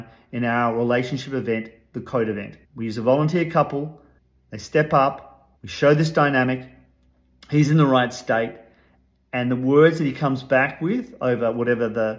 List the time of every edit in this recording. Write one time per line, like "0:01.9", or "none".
0:02.6
0:04.2
0:05.6